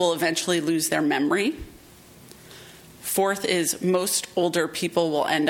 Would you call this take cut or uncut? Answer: uncut